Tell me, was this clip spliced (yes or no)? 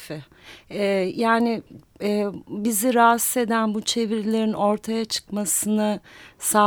no